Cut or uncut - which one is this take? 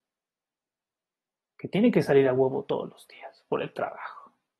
uncut